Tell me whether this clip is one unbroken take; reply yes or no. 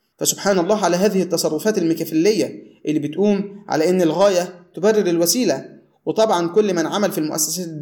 yes